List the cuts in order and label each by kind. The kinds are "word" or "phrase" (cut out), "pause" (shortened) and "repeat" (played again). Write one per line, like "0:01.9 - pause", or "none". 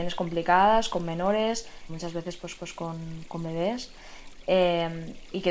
0:01.9 - word
0:02.6 - repeat